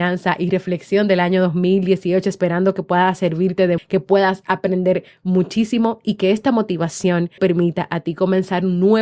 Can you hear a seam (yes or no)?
yes